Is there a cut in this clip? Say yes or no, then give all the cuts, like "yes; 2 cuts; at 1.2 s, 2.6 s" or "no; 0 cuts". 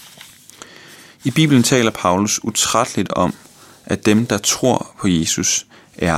no; 0 cuts